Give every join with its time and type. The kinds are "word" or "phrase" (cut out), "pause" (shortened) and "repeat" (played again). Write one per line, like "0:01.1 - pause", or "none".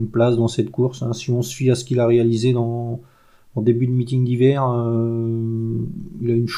none

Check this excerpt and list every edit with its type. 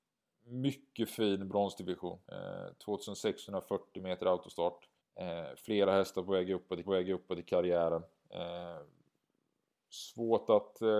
0:02.2 - pause
0:05.0 - pause
0:06.8 - repeat

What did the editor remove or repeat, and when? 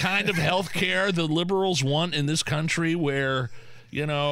none

